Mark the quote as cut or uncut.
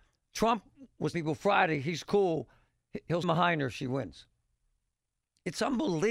cut